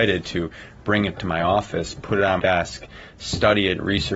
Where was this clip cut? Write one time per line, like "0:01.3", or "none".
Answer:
0:01.1
0:02.4